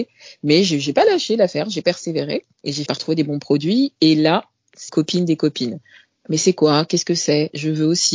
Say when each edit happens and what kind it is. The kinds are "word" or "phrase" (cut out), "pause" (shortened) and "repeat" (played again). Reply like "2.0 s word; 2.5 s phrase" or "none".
2.5 s pause; 2.9 s word; 4.9 s word